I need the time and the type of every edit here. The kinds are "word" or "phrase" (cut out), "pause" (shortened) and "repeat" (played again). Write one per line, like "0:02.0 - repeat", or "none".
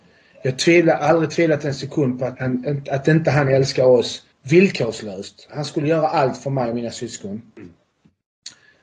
0:02.3 - word
0:04.3 - pause